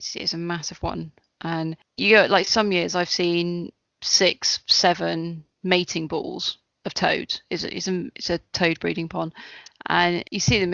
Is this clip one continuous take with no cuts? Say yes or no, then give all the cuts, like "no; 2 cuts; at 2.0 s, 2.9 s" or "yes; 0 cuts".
yes; 0 cuts